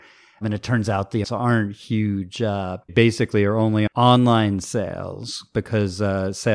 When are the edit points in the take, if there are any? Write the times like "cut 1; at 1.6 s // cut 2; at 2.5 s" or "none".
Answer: cut 1; at 1.2 s // cut 2; at 2.9 s // cut 3; at 3.9 s

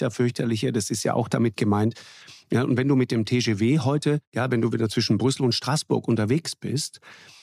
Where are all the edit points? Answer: none

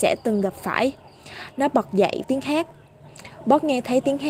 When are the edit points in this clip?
cut 1; at 2.2 s

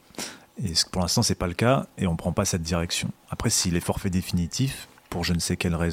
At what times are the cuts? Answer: cut 1; at 5.0 s

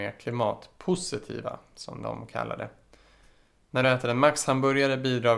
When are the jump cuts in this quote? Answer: none

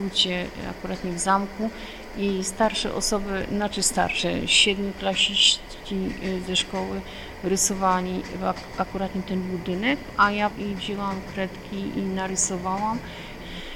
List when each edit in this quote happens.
cut 1; at 10.5 s

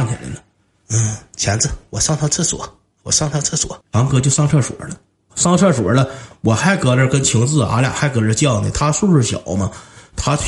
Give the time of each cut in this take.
cut 1; at 3.8 s

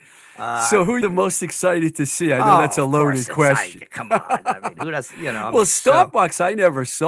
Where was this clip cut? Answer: cut 1; at 1.0 s

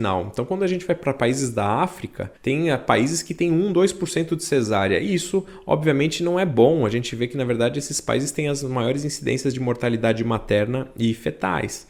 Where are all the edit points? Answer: cut 1; at 2.4 s

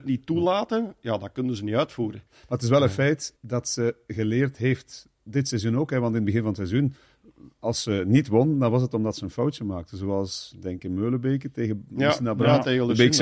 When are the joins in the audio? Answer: cut 1; at 2.3 s // cut 2; at 3.4 s // cut 3; at 7.5 s

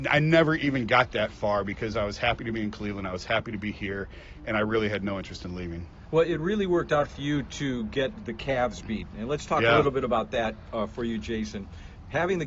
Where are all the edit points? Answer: none

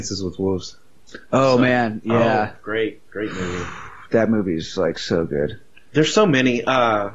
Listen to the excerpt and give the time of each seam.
none

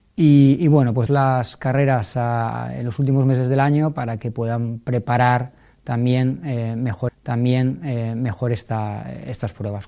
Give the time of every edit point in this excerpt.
cut 1; at 1.1 s // cut 2; at 7.1 s

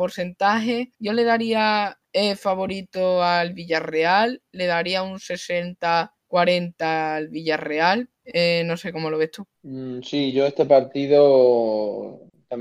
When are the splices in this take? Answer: cut 1; at 0.9 s // cut 2; at 2.0 s // cut 3; at 6.2 s // cut 4; at 8.1 s // cut 5; at 9.5 s

